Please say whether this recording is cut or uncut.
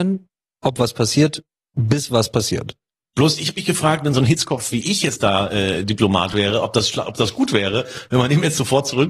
uncut